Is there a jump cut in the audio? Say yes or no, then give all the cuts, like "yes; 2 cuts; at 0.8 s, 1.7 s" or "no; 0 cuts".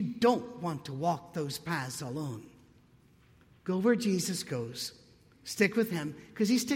no; 0 cuts